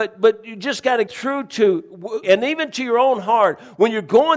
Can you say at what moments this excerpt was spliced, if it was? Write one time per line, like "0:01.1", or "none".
0:01.1
0:02.2